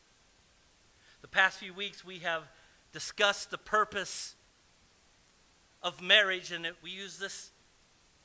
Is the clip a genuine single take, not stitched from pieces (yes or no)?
yes